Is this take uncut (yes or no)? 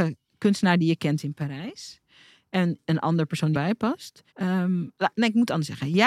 no